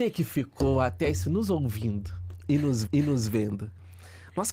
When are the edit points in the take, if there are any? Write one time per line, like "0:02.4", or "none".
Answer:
0:01.2
0:02.9